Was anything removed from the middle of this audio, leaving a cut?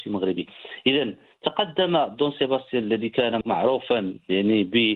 no; 0 cuts

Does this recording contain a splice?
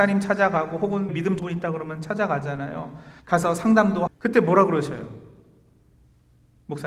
yes; 4 cuts; at 1.1 s, 1.4 s, 3.2 s, 4.1 s

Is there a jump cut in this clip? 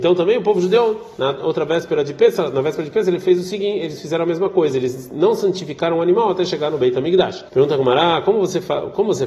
yes; 1 cut; at 7.5 s

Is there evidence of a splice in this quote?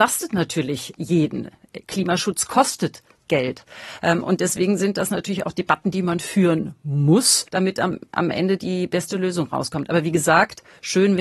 yes; 1 cut; at 7.5 s

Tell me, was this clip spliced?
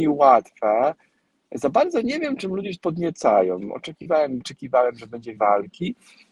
yes; 3 cuts; at 2.8 s, 4.4 s, 5.4 s

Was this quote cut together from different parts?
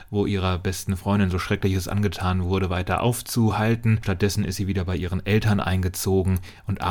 yes; 1 cut; at 4.0 s

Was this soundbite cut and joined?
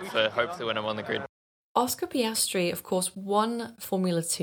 yes; 1 cut; at 1.4 s

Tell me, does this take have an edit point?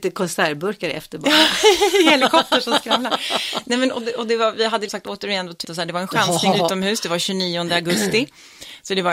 yes; 3 cuts; at 4.9 s, 5.6 s, 6.5 s

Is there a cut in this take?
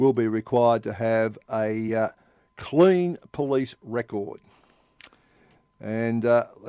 no; 0 cuts

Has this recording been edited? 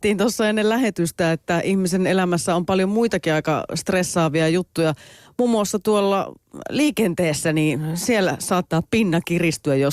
no; 0 cuts

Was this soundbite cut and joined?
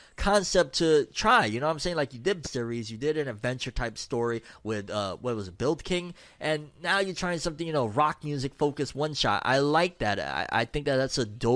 yes; 1 cut; at 2.4 s

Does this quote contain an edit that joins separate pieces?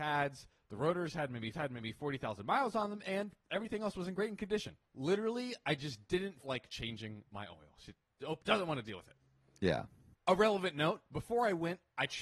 yes; 4 cuts; at 1.5 s, 4.9 s, 6.4 s, 8.4 s

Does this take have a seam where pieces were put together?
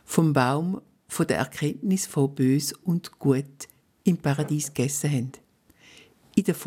no; 0 cuts

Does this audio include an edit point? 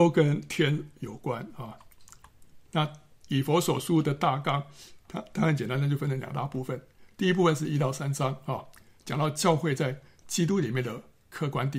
no; 0 cuts

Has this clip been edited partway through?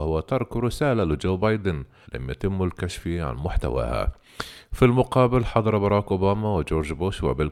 yes; 1 cut; at 2.0 s

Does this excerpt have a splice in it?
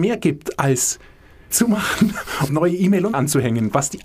yes; 3 cuts; at 1.5 s, 2.5 s, 3.1 s

